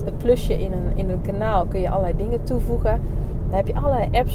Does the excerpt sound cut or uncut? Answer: uncut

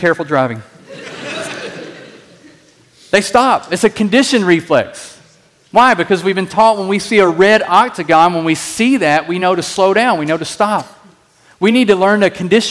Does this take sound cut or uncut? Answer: uncut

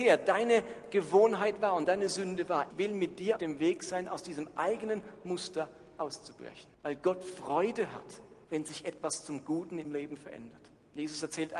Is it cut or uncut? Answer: cut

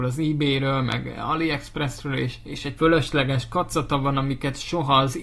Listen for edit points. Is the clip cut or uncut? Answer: cut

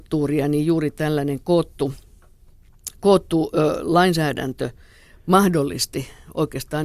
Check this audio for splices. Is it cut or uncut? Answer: uncut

